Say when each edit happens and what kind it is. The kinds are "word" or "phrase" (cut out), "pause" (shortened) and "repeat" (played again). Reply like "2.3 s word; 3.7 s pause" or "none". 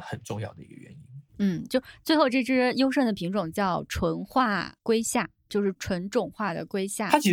1.7 s word